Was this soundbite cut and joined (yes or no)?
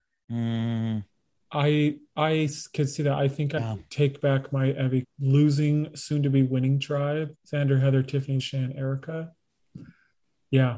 yes